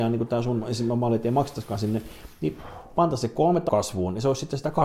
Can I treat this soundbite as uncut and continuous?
no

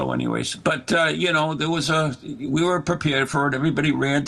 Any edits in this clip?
no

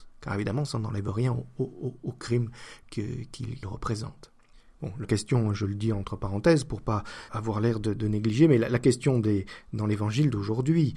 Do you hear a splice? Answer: yes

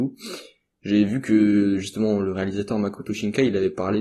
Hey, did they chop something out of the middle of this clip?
no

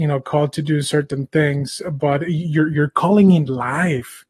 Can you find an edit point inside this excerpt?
no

